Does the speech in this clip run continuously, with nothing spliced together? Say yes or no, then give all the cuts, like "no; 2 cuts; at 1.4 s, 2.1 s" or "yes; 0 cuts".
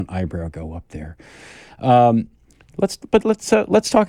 yes; 0 cuts